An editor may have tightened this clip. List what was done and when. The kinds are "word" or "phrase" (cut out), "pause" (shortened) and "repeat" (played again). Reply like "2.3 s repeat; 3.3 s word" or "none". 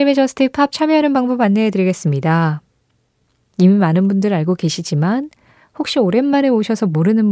none